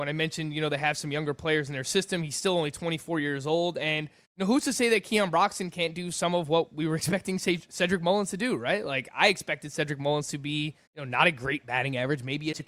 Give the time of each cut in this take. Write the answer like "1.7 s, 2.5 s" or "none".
4.2 s, 10.9 s